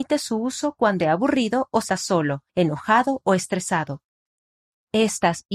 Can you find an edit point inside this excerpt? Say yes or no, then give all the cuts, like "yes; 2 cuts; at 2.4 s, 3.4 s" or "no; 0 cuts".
yes; 3 cuts; at 1.0 s, 1.9 s, 2.5 s